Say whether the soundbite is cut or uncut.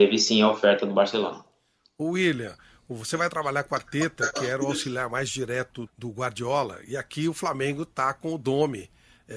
cut